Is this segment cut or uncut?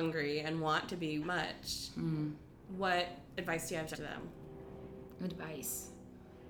cut